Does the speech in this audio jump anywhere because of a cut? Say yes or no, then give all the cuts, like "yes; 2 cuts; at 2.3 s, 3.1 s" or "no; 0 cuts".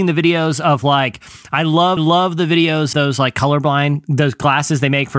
yes; 2 cuts; at 2.0 s, 2.9 s